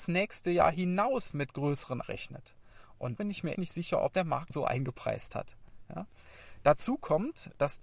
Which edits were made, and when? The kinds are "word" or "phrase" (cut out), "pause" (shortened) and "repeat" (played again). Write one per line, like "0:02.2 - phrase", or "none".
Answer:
0:01.3 - word
0:02.0 - word
0:03.2 - word
0:03.5 - word
0:04.1 - word
0:04.5 - word